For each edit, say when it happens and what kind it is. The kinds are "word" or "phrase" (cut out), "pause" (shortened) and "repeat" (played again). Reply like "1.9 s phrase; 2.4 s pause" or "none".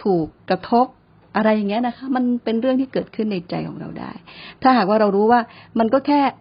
none